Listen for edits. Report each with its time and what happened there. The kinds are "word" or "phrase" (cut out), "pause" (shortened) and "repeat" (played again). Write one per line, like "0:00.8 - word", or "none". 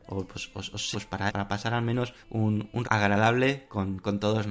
0:00.9 - word
0:01.3 - word
0:02.2 - pause
0:02.8 - word